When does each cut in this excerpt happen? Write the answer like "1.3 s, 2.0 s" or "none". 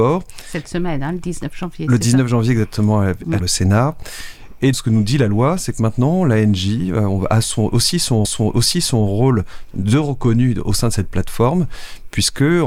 3.4 s, 4.7 s, 8.2 s